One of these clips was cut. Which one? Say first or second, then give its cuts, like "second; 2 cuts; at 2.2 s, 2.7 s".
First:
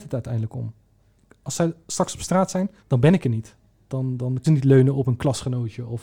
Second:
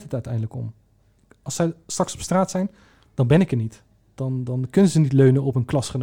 first; 2 cuts; at 2.8 s, 4.4 s